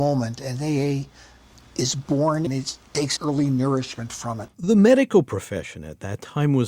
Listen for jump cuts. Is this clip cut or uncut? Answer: cut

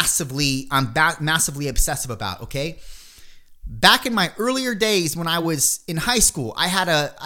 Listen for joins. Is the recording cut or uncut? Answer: uncut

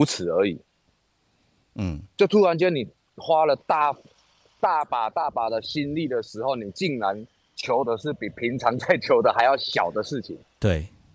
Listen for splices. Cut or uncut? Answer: uncut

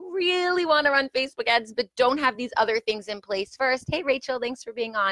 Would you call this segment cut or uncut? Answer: uncut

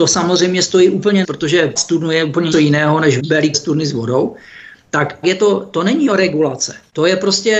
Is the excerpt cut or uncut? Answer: cut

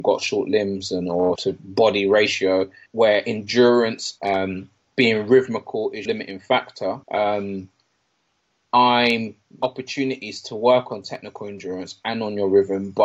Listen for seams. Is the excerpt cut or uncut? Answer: cut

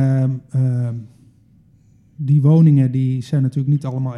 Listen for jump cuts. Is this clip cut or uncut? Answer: uncut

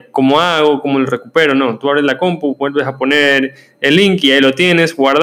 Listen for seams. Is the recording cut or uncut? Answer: uncut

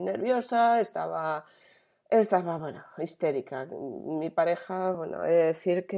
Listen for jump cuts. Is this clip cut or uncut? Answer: uncut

